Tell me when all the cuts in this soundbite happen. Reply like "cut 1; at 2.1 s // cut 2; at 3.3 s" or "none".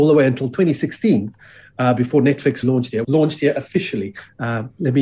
cut 1; at 2.6 s // cut 2; at 3.0 s